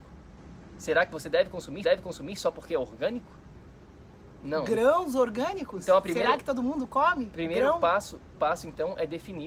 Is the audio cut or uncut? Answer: cut